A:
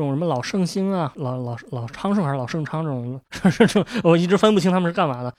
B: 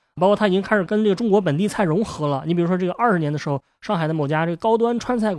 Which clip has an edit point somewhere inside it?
A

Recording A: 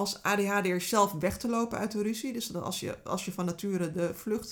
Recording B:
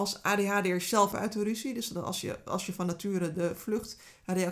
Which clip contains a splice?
B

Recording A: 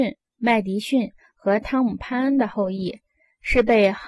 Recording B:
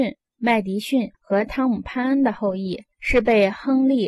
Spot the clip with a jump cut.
B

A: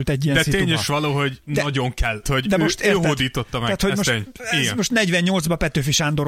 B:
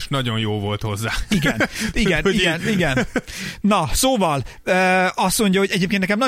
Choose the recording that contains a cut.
A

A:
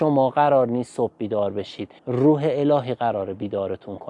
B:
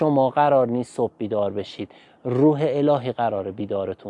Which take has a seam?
A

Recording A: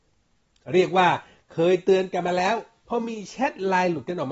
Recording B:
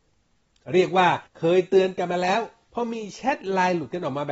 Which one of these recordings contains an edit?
B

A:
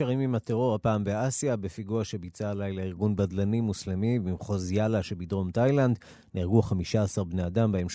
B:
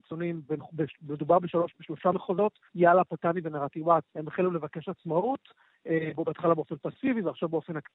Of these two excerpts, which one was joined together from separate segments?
B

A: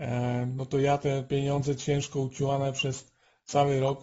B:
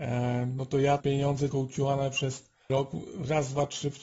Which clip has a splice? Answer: B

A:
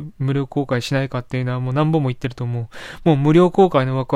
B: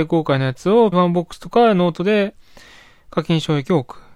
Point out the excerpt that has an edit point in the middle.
B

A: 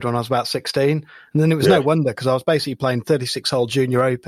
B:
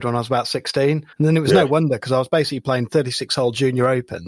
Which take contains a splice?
B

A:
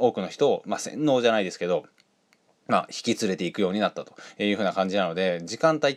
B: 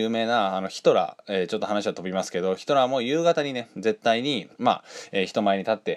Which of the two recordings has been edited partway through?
B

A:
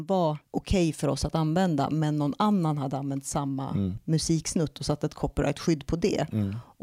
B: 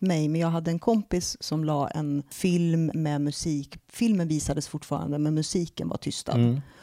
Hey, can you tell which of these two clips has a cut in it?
B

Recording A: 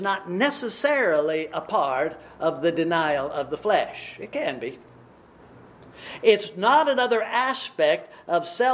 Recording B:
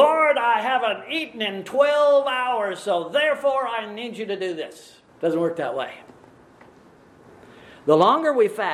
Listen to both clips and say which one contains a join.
B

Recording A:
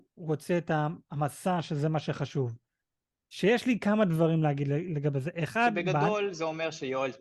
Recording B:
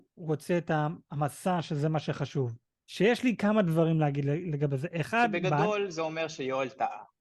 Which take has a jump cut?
B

